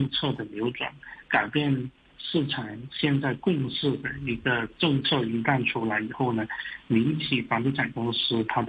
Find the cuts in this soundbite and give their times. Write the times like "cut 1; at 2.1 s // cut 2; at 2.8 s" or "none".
none